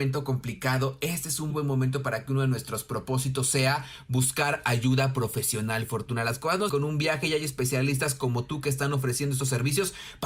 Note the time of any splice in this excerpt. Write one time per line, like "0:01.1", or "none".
0:01.5
0:06.7